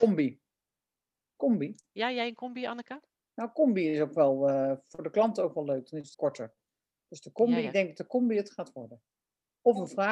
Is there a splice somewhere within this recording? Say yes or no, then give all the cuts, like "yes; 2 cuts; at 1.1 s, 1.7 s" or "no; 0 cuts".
yes; 1 cut; at 6.1 s